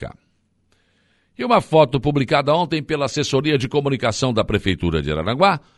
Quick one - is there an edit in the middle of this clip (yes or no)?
no